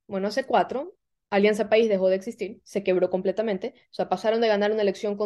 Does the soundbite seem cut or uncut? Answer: uncut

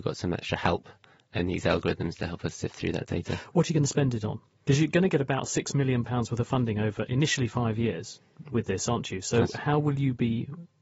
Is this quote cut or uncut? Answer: uncut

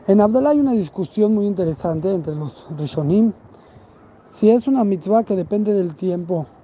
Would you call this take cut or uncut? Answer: uncut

